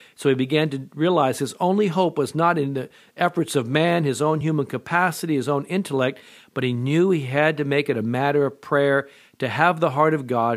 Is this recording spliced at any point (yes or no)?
no